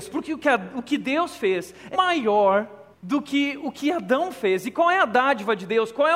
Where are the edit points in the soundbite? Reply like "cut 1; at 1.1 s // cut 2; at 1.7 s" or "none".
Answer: cut 1; at 1.9 s // cut 2; at 2.9 s